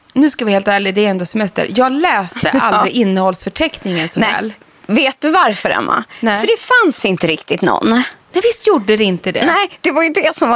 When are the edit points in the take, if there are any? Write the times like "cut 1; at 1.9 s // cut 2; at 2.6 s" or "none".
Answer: none